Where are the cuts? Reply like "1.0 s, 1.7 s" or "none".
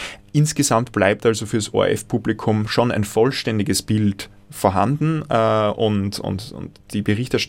none